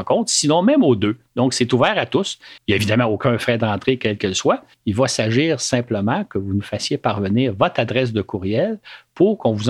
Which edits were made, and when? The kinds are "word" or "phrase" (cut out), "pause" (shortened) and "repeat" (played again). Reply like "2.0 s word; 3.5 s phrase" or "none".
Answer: 2.6 s pause; 4.7 s pause